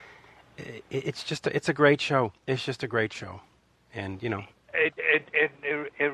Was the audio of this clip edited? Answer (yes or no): no